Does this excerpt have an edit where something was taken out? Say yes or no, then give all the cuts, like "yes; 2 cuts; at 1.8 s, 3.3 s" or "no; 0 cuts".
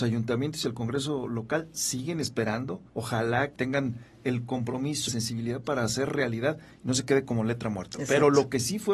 yes; 3 cuts; at 2.9 s, 3.6 s, 5.1 s